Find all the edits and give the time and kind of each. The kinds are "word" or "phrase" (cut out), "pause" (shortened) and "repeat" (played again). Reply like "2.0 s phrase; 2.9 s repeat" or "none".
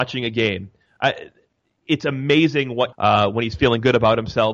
2.9 s phrase